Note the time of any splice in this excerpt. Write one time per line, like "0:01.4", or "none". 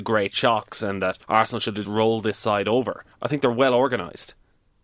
0:01.2
0:01.8
0:03.1